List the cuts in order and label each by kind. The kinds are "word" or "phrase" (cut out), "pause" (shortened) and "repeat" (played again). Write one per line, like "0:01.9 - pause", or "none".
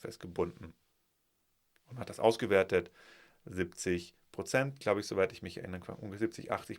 none